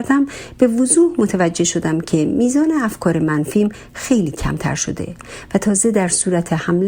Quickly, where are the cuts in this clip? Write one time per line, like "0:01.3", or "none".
none